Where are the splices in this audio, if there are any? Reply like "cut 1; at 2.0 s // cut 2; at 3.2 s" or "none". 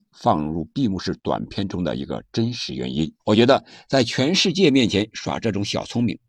cut 1; at 3.2 s